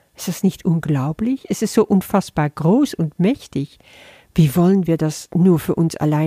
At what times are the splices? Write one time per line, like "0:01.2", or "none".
none